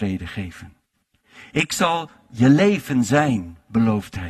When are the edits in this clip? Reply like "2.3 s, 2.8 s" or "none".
none